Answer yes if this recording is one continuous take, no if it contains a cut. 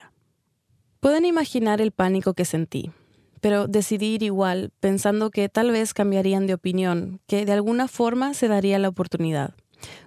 yes